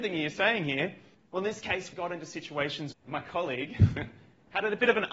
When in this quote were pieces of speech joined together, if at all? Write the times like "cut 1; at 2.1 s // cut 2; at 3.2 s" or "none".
cut 1; at 1.1 s // cut 2; at 1.9 s // cut 3; at 2.9 s